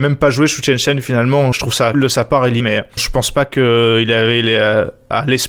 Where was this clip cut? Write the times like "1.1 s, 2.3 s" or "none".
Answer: 1.5 s, 1.9 s, 2.6 s, 3.0 s